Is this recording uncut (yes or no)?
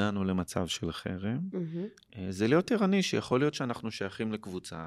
yes